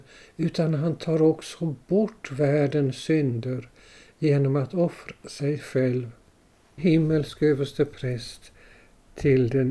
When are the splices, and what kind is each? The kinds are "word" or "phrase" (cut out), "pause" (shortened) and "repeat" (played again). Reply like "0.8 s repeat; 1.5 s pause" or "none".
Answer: 6.8 s word